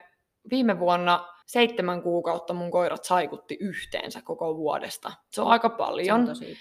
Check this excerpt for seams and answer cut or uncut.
cut